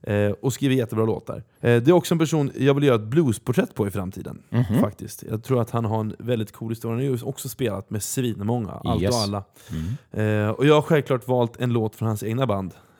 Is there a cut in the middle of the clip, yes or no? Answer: yes